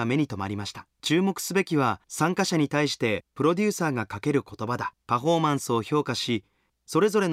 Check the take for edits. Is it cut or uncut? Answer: cut